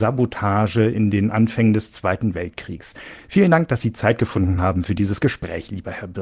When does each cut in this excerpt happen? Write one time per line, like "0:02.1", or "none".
none